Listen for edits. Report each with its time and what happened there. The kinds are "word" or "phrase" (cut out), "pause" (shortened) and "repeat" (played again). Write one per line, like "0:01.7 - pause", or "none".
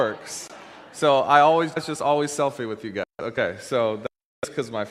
0:01.8 - word